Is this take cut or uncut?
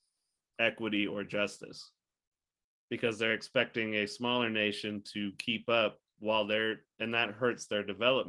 cut